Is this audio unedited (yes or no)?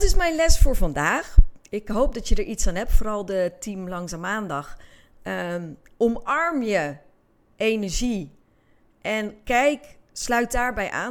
yes